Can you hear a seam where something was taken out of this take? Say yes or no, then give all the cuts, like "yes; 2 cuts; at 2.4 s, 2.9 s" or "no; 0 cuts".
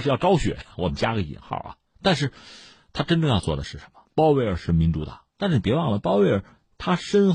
yes; 3 cuts; at 1.9 s, 4.1 s, 5.3 s